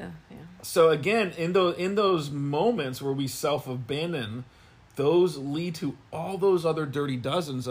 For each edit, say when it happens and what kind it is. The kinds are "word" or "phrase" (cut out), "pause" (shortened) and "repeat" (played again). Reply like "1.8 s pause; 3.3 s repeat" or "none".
none